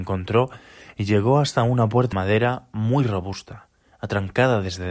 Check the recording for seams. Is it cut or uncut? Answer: cut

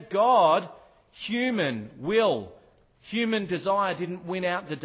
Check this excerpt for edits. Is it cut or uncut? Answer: uncut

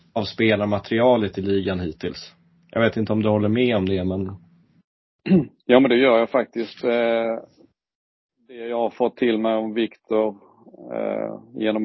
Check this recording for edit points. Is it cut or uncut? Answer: uncut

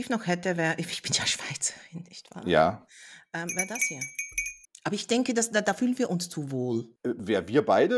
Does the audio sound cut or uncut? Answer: cut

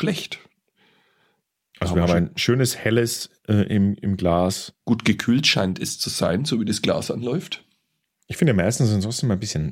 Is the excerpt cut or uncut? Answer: cut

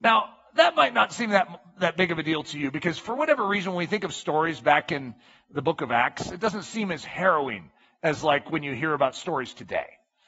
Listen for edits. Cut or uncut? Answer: uncut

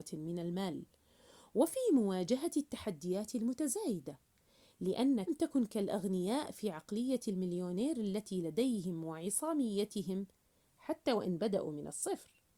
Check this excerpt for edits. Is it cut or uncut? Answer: cut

